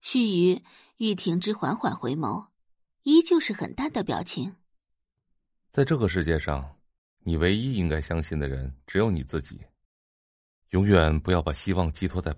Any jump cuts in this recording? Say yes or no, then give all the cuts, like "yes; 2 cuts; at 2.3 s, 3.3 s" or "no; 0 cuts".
no; 0 cuts